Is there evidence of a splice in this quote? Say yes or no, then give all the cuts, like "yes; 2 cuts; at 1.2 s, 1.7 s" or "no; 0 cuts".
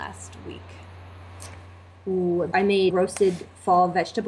yes; 2 cuts; at 2.5 s, 2.9 s